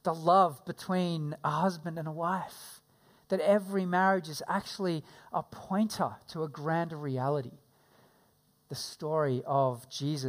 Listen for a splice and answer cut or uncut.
uncut